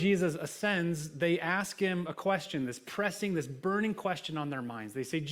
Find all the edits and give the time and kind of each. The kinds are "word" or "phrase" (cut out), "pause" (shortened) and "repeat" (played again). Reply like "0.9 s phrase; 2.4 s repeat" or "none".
none